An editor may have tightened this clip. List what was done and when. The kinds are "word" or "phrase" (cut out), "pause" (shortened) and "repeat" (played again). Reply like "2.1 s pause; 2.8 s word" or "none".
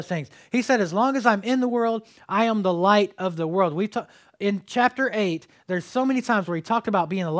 none

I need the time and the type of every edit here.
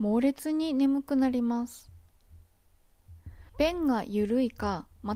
3.5 s pause

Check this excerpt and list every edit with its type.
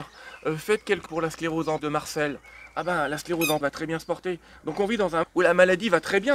1.1 s word; 1.8 s word; 3.6 s word; 5.2 s word

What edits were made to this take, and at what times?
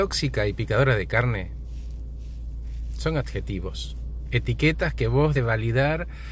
5.3 s word

